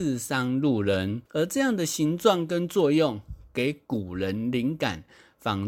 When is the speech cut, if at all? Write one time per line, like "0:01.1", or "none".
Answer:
0:01.3